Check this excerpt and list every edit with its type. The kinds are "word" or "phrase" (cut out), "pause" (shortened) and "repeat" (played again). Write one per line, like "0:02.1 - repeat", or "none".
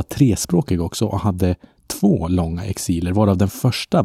none